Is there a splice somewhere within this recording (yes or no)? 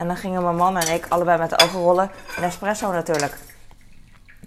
no